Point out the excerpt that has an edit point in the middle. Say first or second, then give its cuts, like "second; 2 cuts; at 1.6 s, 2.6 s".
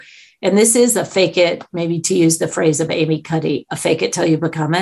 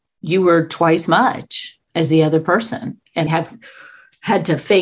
second; 3 cuts; at 1.1 s, 1.8 s, 3.3 s